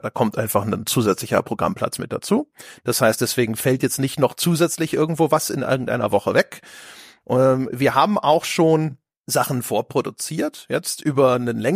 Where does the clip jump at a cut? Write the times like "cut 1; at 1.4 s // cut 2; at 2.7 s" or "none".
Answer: cut 1; at 9.2 s